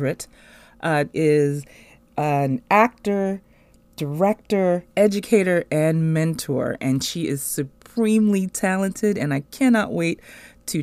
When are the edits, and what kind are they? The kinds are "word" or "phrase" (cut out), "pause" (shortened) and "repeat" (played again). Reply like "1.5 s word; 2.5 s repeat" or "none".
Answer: 1.1 s phrase; 4.9 s pause